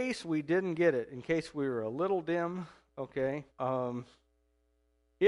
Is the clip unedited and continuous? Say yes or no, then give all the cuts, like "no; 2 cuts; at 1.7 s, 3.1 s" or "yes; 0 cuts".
no; 1 cut; at 3.5 s